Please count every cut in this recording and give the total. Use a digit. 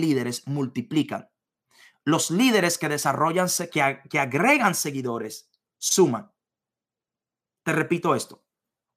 1